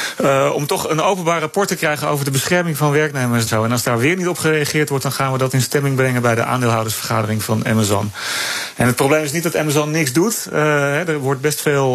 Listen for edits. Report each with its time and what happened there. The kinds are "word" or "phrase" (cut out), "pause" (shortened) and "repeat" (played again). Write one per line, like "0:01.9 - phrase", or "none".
0:03.5 - word
0:05.5 - word